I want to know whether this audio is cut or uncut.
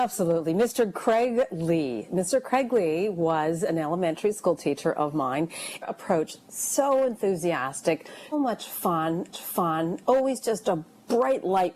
cut